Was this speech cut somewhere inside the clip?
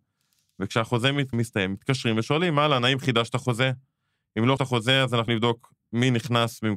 yes; 3 cuts; at 1.3 s, 4.6 s, 5.3 s

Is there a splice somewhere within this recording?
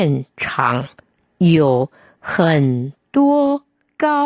no; 0 cuts

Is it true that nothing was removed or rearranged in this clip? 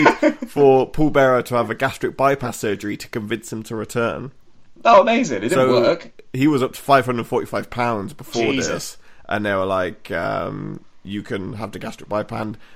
yes; 0 cuts

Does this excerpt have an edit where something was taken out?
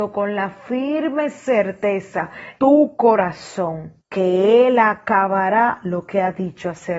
yes; 2 cuts; at 2.6 s, 4.0 s

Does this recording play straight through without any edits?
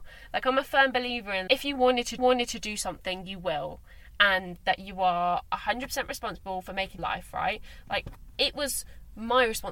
no; 3 cuts; at 1.5 s, 2.2 s, 7.0 s

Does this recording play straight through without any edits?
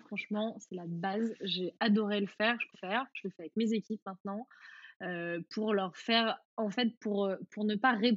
no; 1 cut; at 2.7 s

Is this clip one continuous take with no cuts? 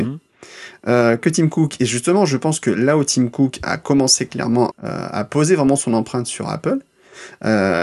no; 1 cut; at 4.7 s

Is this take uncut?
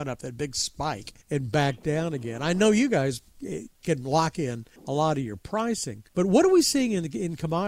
no; 3 cuts; at 1.2 s, 4.8 s, 6.1 s

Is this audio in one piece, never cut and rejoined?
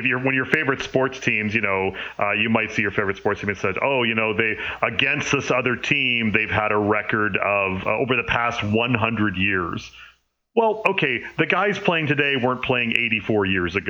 yes; 0 cuts

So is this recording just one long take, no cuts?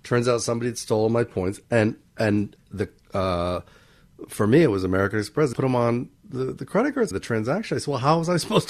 no; 2 cuts; at 5.5 s, 7.1 s

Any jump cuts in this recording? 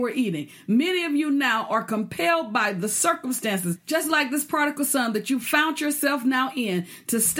no; 0 cuts

